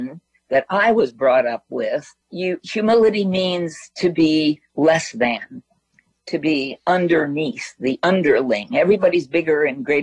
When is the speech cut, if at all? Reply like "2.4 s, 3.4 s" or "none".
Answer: 2.2 s, 4.7 s